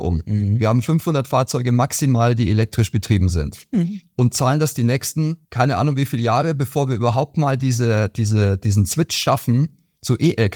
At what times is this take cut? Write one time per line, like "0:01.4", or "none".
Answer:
0:05.4